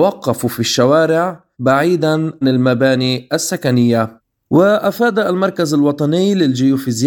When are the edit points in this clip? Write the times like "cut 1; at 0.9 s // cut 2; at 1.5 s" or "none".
cut 1; at 2.4 s